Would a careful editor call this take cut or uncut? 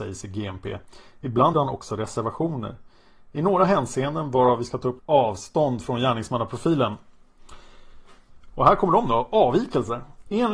cut